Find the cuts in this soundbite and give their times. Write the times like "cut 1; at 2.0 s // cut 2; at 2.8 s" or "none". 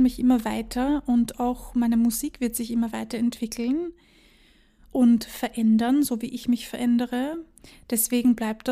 none